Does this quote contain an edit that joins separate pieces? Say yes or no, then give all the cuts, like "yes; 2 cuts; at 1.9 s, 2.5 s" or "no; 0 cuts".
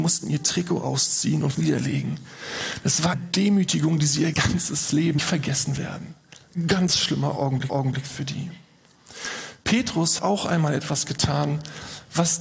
yes; 6 cuts; at 1.5 s, 3.1 s, 4.3 s, 5.2 s, 7.7 s, 10.2 s